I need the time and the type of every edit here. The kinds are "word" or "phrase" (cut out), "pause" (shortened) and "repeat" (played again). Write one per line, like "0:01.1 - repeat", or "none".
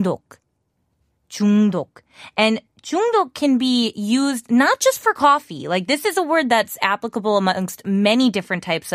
none